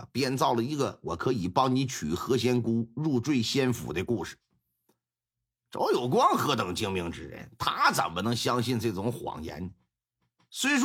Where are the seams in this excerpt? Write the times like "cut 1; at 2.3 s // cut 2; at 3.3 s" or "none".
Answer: none